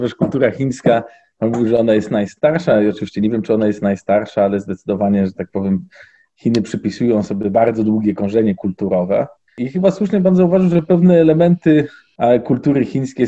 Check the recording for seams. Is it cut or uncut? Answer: uncut